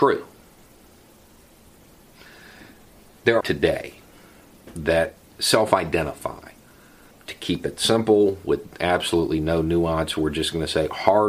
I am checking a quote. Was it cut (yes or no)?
yes